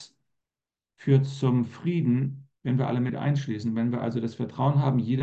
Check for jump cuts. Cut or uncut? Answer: cut